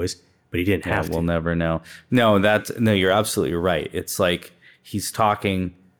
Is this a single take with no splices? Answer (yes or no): yes